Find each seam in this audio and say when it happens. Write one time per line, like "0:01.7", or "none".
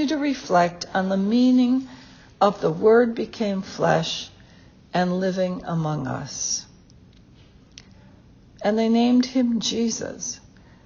none